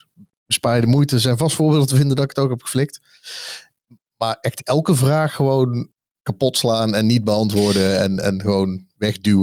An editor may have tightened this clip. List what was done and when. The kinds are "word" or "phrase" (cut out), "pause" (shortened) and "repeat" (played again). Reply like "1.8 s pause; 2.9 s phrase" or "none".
none